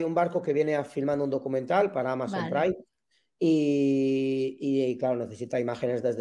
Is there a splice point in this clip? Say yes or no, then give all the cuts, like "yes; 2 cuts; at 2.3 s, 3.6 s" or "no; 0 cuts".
no; 0 cuts